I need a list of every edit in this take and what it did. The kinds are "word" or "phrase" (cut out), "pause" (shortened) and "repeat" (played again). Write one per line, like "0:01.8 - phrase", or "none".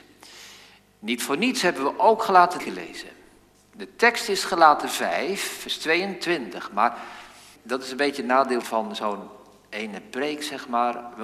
0:02.6 - word
0:07.6 - word
0:08.6 - word